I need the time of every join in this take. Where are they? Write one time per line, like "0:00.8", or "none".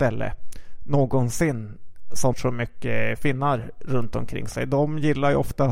0:02.3